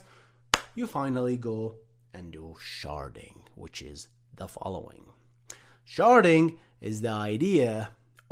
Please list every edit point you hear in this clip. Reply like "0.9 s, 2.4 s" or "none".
none